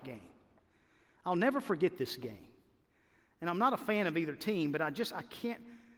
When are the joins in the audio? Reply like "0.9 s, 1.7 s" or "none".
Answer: none